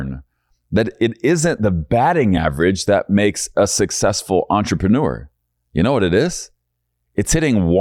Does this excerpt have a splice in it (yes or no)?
no